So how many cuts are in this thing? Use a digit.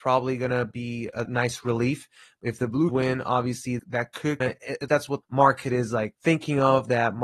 7